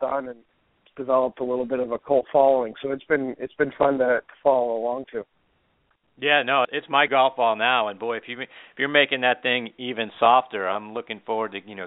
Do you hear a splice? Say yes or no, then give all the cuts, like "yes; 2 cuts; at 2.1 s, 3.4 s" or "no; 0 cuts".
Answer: yes; 2 cuts; at 6.6 s, 7.1 s